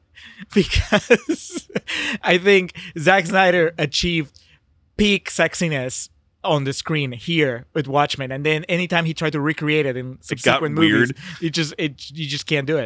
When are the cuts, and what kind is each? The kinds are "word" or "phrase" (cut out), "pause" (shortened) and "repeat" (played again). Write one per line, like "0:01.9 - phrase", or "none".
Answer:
none